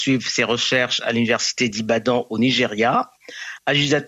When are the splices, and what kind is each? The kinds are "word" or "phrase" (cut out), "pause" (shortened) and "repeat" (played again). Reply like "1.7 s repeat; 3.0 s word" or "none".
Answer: none